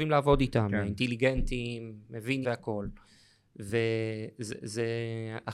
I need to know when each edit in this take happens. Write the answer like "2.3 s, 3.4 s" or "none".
2.4 s